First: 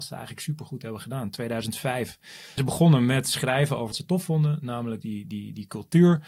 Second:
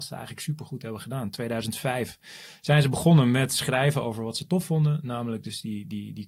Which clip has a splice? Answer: first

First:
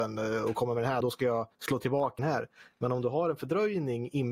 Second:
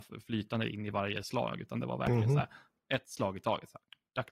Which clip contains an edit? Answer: first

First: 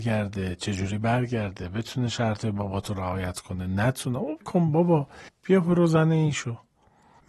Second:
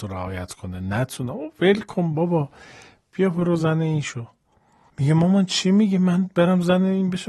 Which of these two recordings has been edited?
first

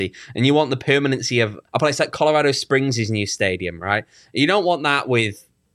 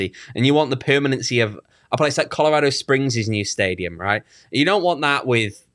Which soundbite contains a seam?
first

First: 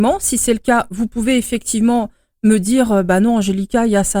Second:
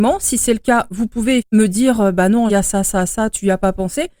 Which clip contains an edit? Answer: second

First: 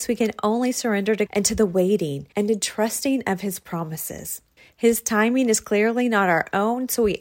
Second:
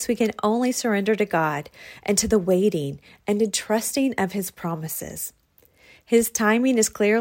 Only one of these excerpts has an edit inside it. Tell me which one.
first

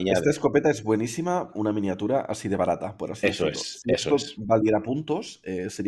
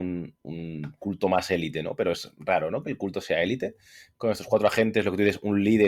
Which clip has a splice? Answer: first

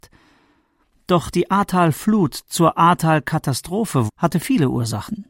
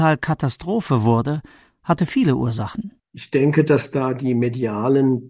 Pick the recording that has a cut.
first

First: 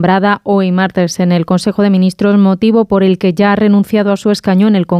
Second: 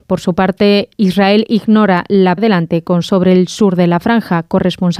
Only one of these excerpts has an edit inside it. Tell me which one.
second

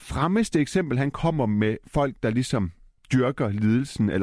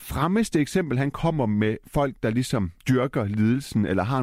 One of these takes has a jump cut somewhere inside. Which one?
second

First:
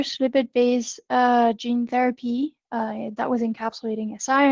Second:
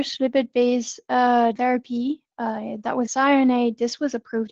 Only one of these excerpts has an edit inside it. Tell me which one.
second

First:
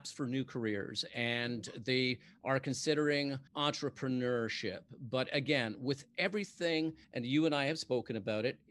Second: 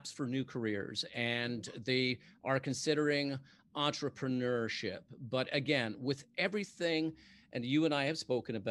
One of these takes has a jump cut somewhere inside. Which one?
first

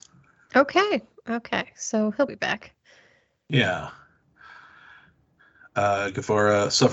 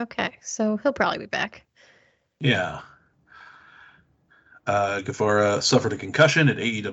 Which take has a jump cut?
first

